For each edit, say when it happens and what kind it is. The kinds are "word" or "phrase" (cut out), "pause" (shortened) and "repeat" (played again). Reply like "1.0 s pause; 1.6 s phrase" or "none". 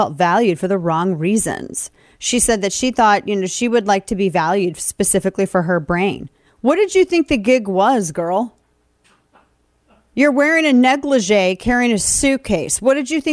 none